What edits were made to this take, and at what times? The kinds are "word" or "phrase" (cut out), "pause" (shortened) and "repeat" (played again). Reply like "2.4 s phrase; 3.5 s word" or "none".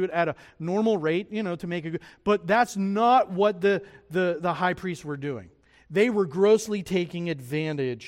none

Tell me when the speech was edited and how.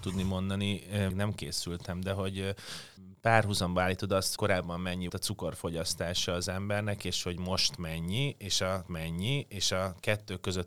1.1 s phrase; 3.0 s pause; 4.4 s word; 5.1 s word; 8.9 s repeat

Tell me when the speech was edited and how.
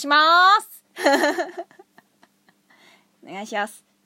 none

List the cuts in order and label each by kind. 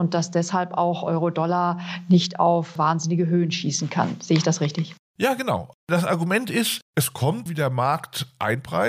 7.5 s word

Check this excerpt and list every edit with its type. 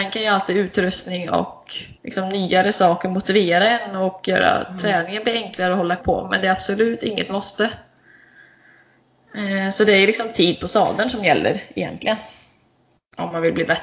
2.0 s pause; 6.0 s word

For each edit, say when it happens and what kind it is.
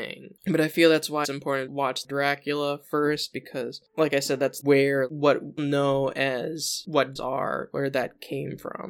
1.2 s word; 1.7 s word; 3.3 s word; 4.6 s word; 5.6 s word; 7.2 s word

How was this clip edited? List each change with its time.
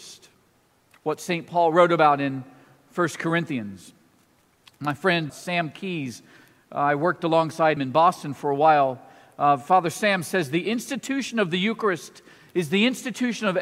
5.3 s word; 7.8 s word

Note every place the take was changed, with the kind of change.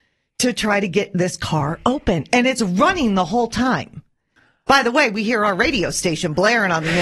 none

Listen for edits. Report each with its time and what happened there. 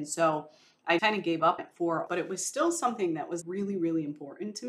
1.0 s word; 1.6 s word; 2.1 s word; 3.4 s word

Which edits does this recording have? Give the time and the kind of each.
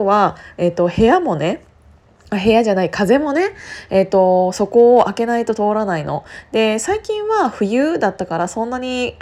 none

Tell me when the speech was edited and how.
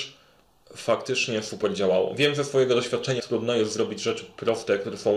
3.2 s word

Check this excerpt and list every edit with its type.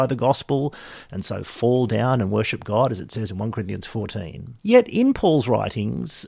4.6 s pause

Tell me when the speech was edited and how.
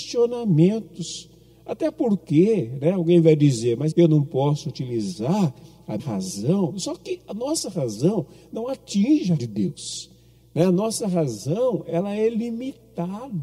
3.9 s word; 6.0 s word; 9.4 s word

